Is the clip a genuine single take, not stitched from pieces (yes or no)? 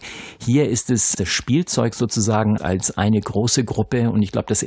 no